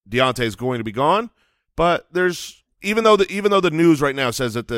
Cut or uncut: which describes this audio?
uncut